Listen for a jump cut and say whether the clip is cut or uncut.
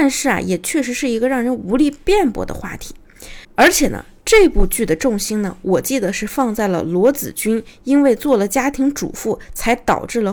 cut